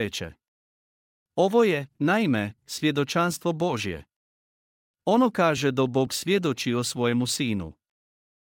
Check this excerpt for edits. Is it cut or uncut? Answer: uncut